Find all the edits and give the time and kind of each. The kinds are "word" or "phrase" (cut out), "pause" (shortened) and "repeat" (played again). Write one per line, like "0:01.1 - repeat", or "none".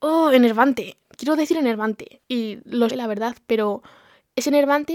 0:02.2 - pause
0:02.9 - word